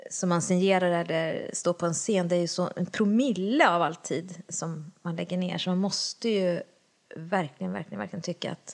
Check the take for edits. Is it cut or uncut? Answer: uncut